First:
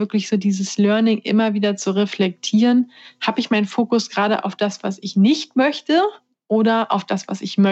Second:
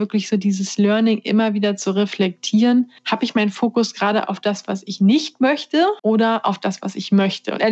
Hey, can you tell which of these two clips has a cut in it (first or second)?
second